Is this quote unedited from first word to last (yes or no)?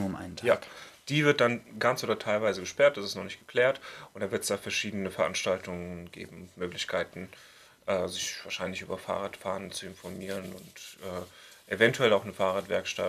yes